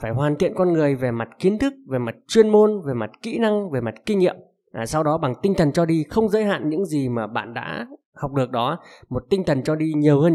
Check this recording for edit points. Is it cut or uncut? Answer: uncut